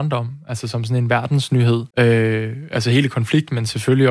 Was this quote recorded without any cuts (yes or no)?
no